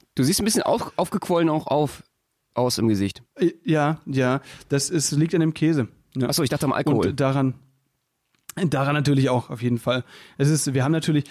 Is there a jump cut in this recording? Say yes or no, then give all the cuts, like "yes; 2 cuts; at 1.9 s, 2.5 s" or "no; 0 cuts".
no; 0 cuts